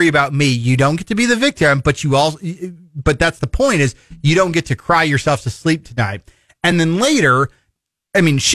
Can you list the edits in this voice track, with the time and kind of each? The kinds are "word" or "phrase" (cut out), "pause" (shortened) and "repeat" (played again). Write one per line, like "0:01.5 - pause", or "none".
none

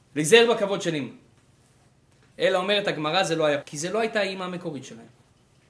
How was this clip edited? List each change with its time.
0:03.6 - word

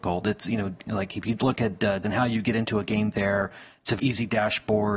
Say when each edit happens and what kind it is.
0:02.0 - word
0:04.0 - word

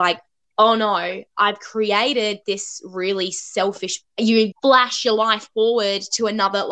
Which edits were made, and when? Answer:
0:04.0 - phrase
0:04.5 - word

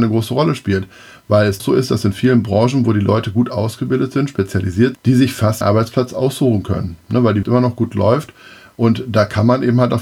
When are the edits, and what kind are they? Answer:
0:01.6 - word
0:04.9 - word
0:05.6 - word
0:07.4 - word

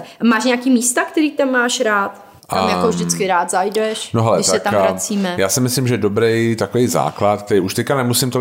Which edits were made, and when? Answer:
0:02.4 - pause

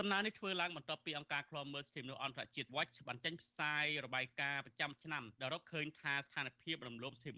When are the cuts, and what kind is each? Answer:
0:02.7 - phrase
0:05.3 - pause

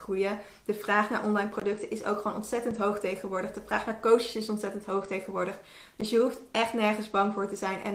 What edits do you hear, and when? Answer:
none

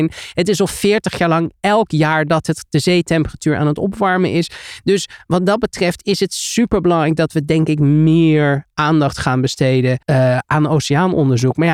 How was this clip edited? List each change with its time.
0:10.0 - pause

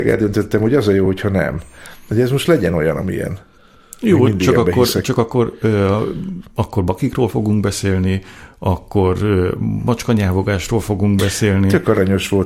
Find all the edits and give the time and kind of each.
none

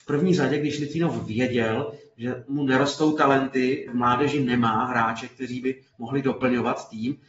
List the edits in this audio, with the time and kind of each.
0:03.9 - word
0:05.9 - pause

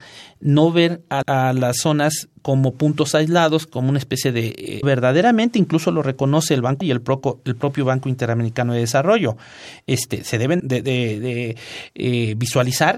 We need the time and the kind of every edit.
0:01.2 - word
0:02.4 - pause
0:04.8 - phrase
0:06.8 - word
0:10.6 - word

